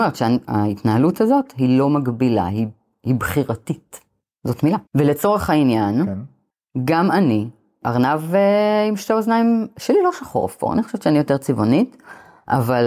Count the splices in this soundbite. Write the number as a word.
one